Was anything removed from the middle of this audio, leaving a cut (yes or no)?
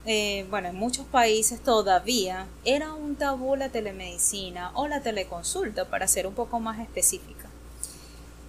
no